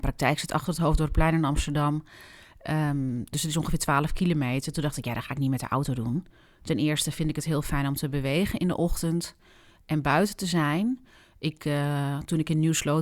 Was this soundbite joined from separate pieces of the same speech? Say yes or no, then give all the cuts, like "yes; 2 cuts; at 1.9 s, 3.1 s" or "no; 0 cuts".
no; 0 cuts